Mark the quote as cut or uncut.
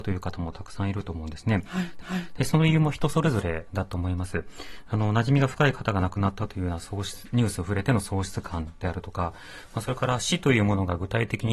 cut